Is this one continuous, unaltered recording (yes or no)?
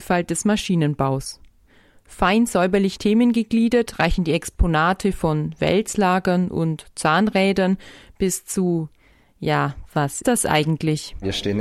no